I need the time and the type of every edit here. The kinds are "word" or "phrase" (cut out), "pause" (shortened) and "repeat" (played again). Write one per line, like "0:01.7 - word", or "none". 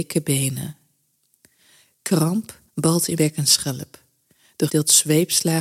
0:02.7 - pause
0:03.2 - word
0:04.7 - phrase